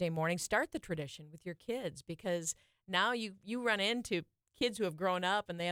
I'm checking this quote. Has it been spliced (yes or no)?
no